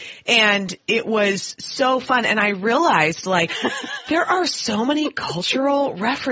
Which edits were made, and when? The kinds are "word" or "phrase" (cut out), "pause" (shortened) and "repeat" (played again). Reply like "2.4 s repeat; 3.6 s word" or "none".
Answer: none